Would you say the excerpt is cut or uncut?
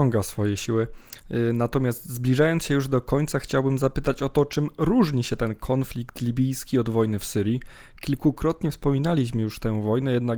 uncut